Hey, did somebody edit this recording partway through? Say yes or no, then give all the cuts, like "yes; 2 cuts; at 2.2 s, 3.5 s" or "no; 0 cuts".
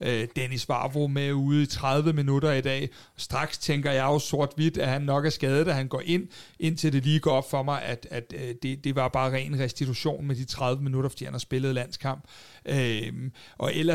no; 0 cuts